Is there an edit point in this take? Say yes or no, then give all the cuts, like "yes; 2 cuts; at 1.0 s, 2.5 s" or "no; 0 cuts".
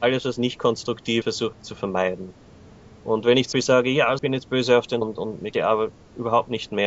yes; 6 cuts; at 1.2 s, 1.5 s, 3.5 s, 4.2 s, 5.0 s, 5.5 s